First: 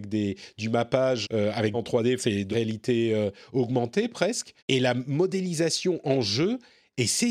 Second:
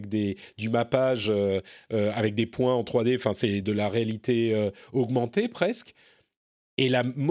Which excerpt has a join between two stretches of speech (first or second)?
first